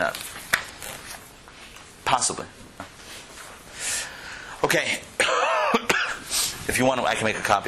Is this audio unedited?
no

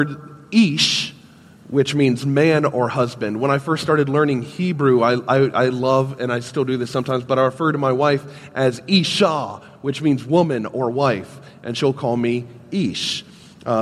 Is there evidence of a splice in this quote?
no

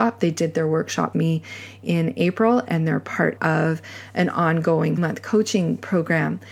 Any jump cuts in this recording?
yes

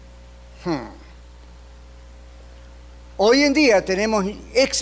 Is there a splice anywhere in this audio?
no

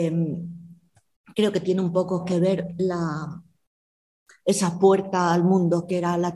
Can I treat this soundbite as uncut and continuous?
yes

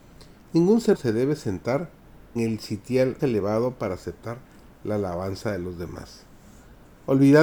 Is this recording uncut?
no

